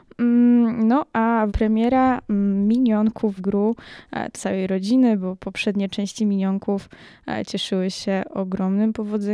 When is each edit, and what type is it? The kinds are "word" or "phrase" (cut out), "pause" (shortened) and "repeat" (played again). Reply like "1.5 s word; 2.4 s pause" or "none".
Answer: 1.5 s phrase; 3.4 s word; 4.3 s phrase